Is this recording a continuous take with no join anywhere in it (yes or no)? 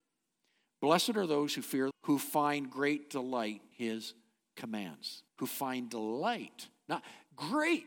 no